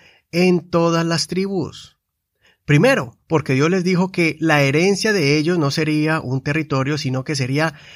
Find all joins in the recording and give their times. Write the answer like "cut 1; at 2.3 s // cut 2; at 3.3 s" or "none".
none